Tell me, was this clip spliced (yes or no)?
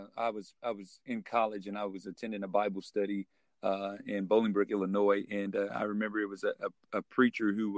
no